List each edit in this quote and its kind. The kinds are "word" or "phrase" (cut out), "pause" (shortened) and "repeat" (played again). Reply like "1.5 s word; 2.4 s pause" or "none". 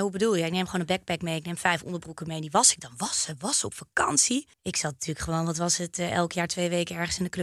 4.5 s pause